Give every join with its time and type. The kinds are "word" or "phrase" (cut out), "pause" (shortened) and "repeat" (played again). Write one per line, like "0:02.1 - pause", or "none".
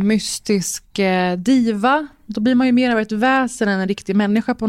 none